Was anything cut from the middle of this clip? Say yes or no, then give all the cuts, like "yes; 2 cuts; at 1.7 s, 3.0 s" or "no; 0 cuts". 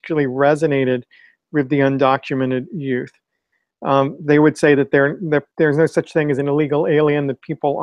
yes; 1 cut; at 5.5 s